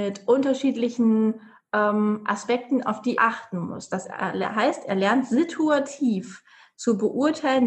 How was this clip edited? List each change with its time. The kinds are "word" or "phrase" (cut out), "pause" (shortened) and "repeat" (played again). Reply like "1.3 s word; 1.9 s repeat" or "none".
3.2 s word